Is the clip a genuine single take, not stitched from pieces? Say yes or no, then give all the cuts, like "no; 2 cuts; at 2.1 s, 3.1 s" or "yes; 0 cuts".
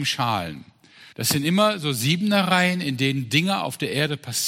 no; 1 cut; at 1.1 s